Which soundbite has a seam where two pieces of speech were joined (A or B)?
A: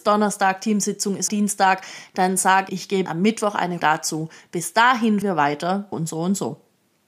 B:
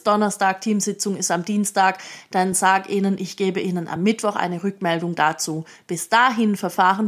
A